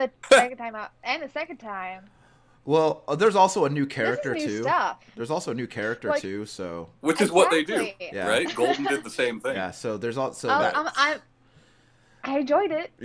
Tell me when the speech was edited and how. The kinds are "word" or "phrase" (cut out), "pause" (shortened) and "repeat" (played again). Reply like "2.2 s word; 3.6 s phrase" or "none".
none